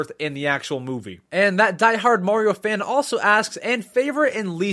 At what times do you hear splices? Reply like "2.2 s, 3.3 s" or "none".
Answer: none